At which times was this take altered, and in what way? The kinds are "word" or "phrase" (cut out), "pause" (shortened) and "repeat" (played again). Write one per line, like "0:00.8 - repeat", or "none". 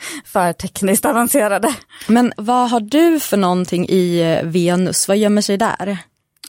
0:02.4 - word

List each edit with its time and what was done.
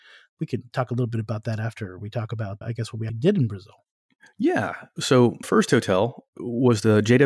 0:02.6 - word
0:03.1 - word
0:05.4 - word

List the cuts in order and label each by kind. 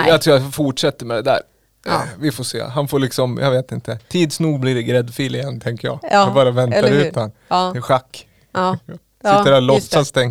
0:04.0 - pause

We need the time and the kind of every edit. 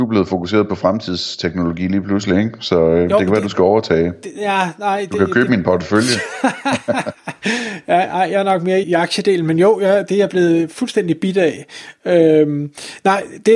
0:08.8 - word

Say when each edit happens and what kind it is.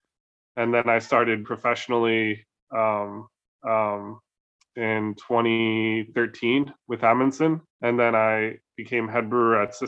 0:01.4 - word
0:03.6 - repeat
0:07.7 - pause

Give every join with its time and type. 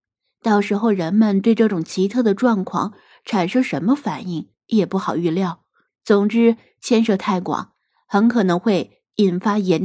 0:05.9 - pause

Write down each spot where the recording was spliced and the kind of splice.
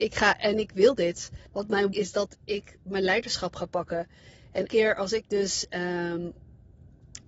0:01.5 - pause
0:01.9 - word
0:04.7 - word

